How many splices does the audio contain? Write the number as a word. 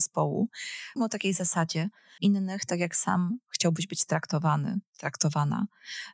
two